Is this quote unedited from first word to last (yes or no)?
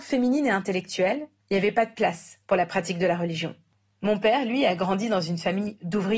yes